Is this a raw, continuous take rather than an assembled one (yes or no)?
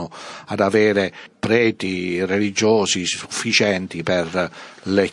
yes